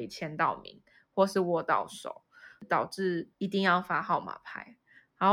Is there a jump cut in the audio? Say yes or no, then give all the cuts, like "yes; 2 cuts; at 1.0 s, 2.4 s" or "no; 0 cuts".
no; 0 cuts